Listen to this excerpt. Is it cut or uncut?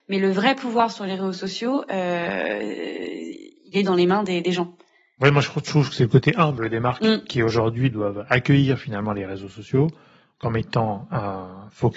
uncut